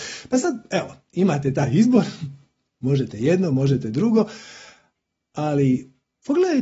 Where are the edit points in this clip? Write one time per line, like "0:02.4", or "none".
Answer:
none